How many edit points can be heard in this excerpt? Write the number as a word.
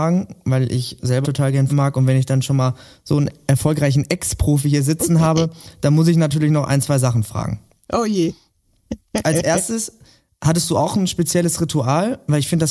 two